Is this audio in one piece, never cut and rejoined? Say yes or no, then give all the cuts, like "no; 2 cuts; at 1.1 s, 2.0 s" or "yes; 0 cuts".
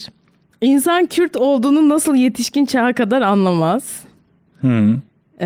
yes; 0 cuts